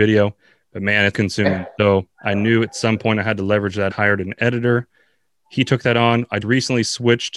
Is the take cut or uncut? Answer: cut